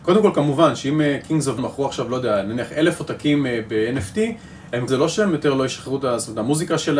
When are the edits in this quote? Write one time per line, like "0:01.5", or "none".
0:01.6
0:04.9

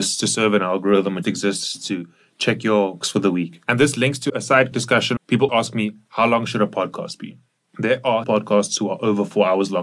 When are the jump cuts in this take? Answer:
0:01.2
0:03.0
0:04.3
0:04.7
0:05.2
0:05.5
0:08.2

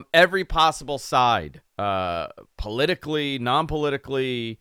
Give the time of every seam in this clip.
0:01.7

